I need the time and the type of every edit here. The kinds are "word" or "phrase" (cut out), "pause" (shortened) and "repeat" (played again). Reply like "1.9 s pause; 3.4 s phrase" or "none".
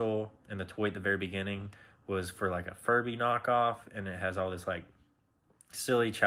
none

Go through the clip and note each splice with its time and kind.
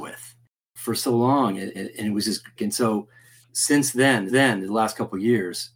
1.7 s repeat; 2.6 s word; 4.3 s repeat

